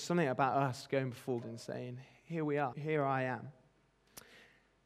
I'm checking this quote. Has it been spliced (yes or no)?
yes